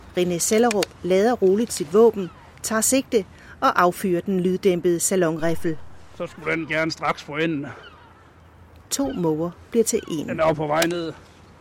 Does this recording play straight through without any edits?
yes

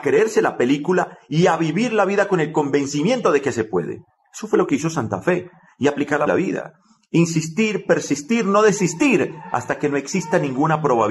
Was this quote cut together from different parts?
yes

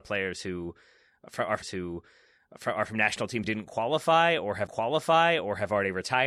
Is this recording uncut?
no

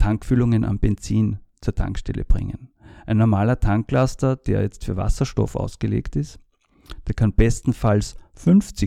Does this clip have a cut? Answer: no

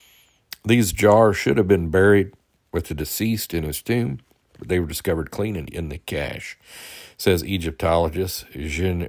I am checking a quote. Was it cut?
yes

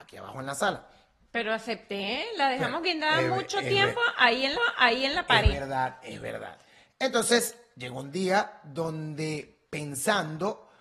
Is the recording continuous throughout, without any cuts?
no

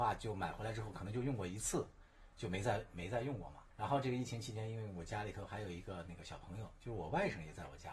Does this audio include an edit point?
yes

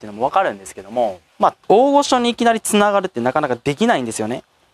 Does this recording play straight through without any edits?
no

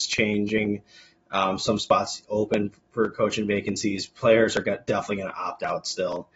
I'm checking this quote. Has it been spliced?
no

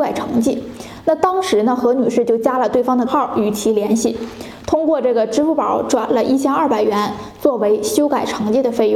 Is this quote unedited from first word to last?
no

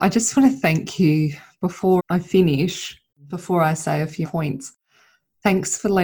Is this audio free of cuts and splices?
no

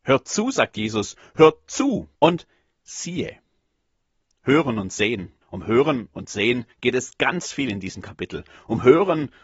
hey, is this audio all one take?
no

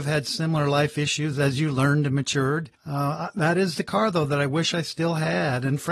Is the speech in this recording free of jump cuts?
no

